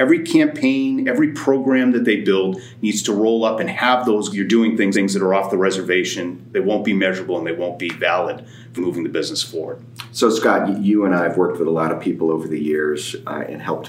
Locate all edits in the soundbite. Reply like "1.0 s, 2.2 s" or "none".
4.3 s, 4.9 s, 8.8 s